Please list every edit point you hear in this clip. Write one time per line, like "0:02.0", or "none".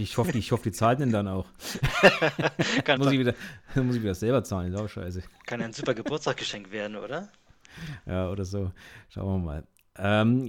0:03.0